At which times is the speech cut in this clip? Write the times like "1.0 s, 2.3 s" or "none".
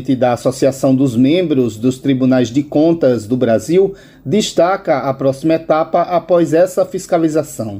none